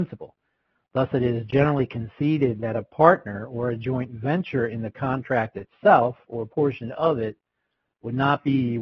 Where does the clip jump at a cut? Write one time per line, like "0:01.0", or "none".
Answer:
none